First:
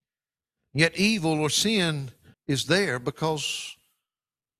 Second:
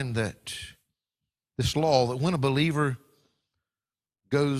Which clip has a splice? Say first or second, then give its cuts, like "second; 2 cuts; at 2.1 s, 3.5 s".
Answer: first; 1 cut; at 2.3 s